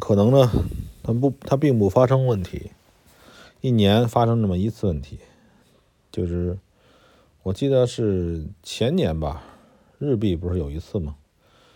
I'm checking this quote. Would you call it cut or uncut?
uncut